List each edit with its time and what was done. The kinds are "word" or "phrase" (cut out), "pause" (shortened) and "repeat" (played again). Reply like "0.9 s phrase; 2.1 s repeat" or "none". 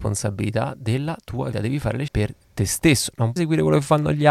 1.5 s word; 2.1 s word; 3.4 s word